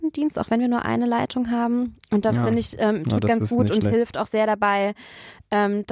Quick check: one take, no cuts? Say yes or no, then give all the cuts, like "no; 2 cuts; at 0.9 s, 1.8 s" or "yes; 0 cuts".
yes; 0 cuts